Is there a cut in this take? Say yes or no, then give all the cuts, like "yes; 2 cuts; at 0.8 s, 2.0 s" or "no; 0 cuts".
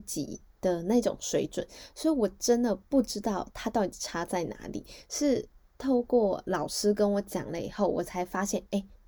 no; 0 cuts